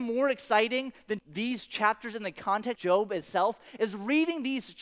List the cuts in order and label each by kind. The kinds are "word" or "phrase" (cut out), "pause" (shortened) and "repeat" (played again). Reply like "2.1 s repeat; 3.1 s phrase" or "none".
1.2 s phrase; 2.8 s word